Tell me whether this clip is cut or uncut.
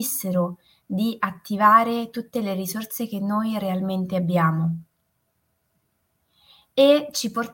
uncut